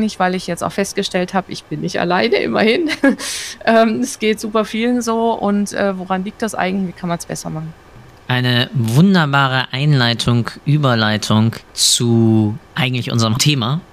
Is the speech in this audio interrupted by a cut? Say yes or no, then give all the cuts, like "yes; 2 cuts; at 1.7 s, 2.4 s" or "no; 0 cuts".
no; 0 cuts